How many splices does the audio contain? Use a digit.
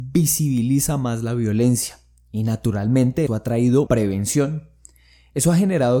2